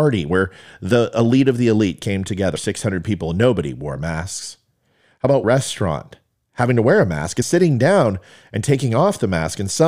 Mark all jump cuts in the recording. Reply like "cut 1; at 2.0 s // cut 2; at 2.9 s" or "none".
cut 1; at 2.6 s // cut 2; at 5.4 s // cut 3; at 7.4 s